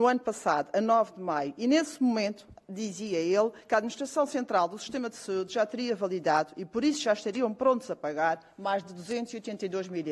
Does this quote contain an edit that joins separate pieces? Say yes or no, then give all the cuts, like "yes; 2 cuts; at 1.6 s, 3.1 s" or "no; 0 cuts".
no; 0 cuts